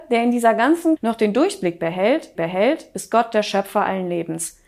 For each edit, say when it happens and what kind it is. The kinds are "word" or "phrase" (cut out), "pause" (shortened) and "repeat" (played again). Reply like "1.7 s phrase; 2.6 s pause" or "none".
1.0 s word; 2.3 s repeat